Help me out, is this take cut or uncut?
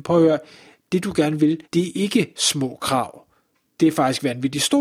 cut